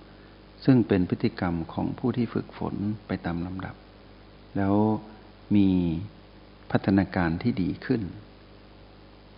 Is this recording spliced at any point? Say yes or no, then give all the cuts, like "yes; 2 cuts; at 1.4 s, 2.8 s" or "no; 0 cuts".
no; 0 cuts